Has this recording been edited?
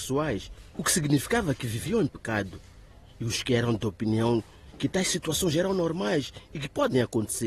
no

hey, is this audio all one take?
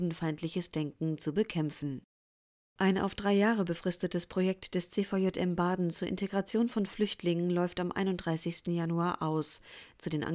no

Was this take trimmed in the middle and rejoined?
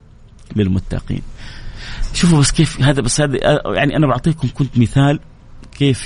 no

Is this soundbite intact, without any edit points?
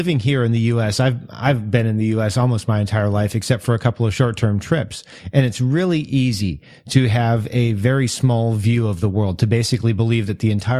yes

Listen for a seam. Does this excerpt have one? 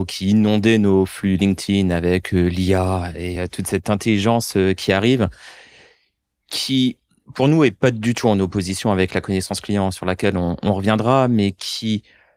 no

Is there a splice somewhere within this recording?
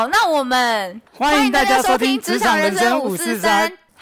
yes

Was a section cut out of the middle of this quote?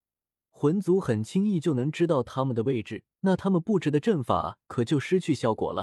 yes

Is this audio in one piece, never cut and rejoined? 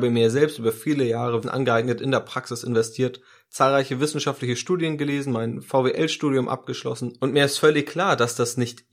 no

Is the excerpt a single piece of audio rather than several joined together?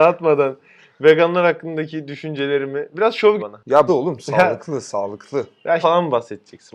no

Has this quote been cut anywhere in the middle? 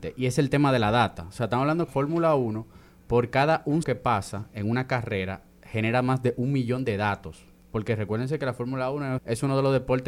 yes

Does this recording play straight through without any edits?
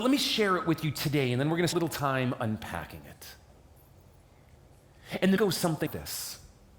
no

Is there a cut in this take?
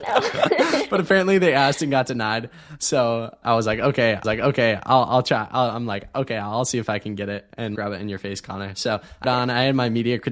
yes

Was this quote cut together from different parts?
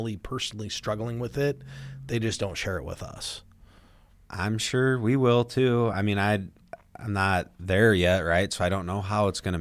no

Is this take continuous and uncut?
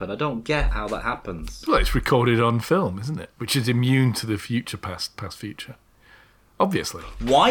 yes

